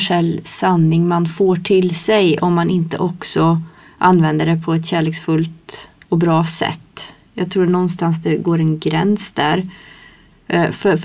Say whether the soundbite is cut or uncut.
uncut